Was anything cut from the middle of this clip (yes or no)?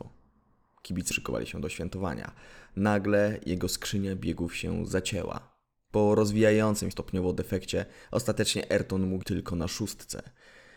yes